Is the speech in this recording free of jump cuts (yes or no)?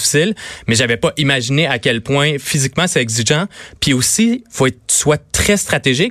yes